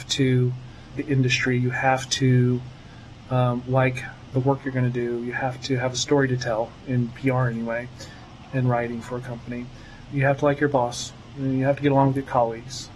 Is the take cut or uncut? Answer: cut